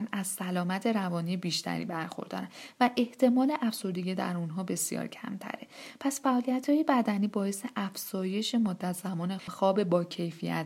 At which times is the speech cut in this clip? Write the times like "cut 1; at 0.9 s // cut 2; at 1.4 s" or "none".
cut 1; at 9.4 s